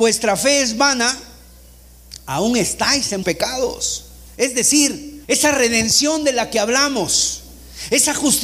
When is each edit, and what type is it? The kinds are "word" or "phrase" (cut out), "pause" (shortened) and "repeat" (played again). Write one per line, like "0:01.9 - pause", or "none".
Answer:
0:03.2 - word
0:05.2 - pause